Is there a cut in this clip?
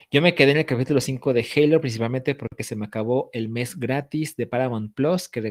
no; 0 cuts

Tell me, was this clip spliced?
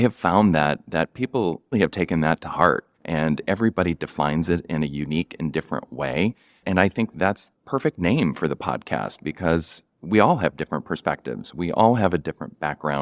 yes; 3 cuts; at 1.7 s, 2.9 s, 7.5 s

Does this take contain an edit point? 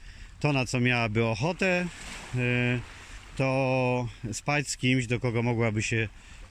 no; 0 cuts

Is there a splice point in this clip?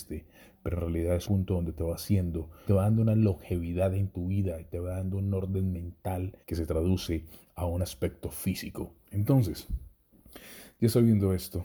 yes; 4 cuts; at 1.2 s, 2.6 s, 6.4 s, 9.0 s

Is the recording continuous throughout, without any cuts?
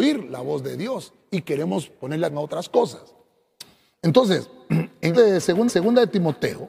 no; 3 cuts; at 2.3 s, 5.1 s, 5.7 s

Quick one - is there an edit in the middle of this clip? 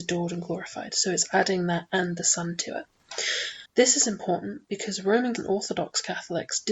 yes; 2 cuts; at 3.7 s, 5.4 s

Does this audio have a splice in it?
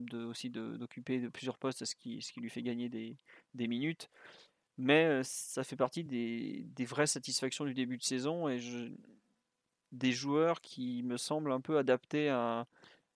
no; 0 cuts

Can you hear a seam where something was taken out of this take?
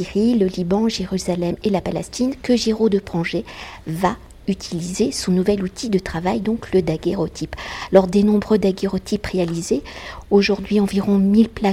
no; 0 cuts

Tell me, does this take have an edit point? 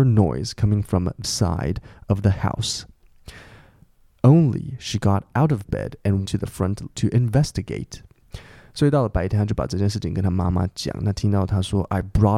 yes; 3 cuts; at 1.2 s, 6.2 s, 6.9 s

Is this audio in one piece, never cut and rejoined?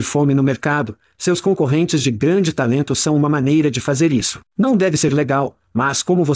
no; 1 cut; at 4.5 s

